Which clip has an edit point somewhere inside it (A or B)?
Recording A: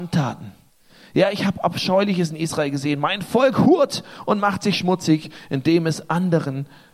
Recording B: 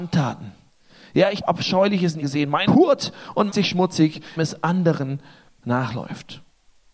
B